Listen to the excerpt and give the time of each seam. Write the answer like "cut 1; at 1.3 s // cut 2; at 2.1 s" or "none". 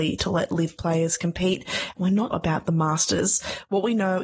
cut 1; at 2.3 s

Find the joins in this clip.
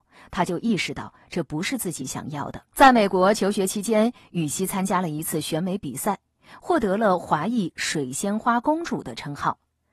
cut 1; at 2.7 s

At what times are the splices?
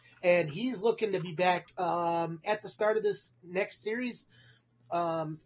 cut 1; at 2.4 s

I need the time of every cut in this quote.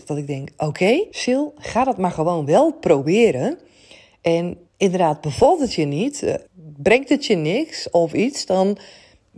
cut 1; at 1.1 s // cut 2; at 4.7 s // cut 3; at 6.5 s

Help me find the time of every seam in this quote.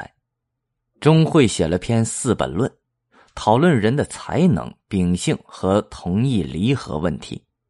none

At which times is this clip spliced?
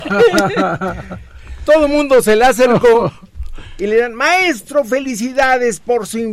none

